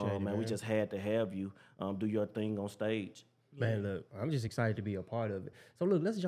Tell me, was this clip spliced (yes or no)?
no